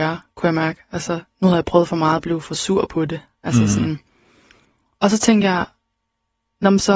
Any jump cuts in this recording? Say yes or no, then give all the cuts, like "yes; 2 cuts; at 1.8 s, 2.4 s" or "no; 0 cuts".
no; 0 cuts